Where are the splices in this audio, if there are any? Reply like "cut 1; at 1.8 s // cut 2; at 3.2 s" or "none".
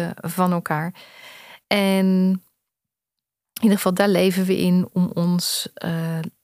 cut 1; at 1.6 s